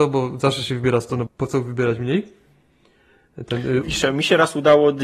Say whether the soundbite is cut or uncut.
cut